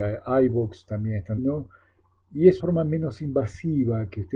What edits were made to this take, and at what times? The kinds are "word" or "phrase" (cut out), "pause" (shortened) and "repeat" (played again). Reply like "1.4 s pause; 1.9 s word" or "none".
1.4 s word; 2.6 s word